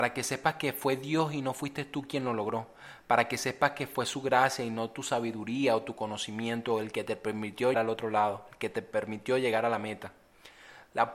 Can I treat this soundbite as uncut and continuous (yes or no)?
no